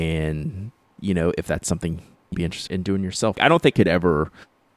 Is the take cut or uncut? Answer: cut